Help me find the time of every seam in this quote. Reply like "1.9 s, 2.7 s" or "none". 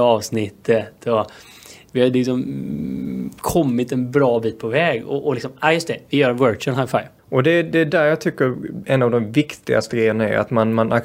7.2 s